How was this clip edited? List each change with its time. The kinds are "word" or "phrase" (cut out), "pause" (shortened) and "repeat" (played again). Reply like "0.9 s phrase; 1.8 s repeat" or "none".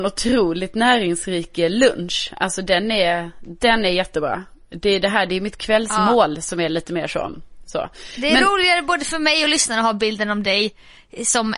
none